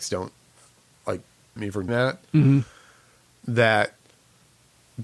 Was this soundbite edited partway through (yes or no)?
yes